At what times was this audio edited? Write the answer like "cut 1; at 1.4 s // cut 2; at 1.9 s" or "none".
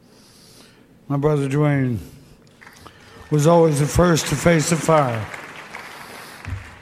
none